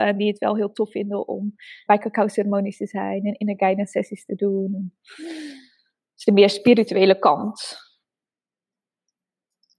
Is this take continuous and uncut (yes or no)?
no